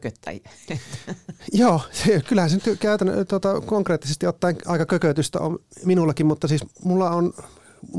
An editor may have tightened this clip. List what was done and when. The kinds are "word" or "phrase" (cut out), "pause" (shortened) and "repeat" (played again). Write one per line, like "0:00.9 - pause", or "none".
none